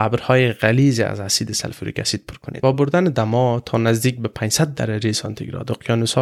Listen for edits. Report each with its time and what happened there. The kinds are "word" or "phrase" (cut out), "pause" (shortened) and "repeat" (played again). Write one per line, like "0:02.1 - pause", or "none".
0:02.7 - word